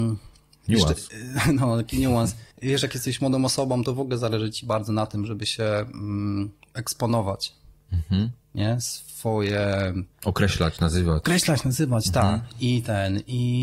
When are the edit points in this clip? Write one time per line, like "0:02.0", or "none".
0:02.5
0:08.4
0:10.1